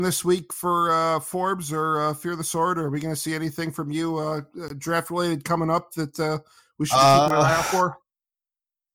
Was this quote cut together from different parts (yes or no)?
no